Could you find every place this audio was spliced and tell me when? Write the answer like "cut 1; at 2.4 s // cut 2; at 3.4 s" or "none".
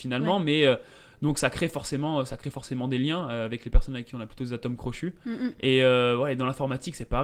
none